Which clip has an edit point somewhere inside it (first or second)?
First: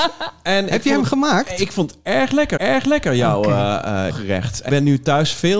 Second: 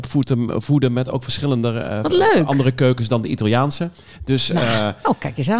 first